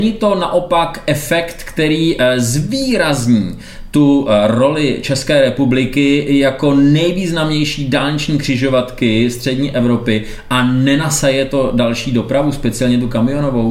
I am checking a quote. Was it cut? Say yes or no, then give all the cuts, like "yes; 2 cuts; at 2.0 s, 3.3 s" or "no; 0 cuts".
no; 0 cuts